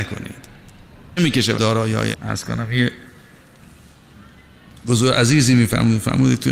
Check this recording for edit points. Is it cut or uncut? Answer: cut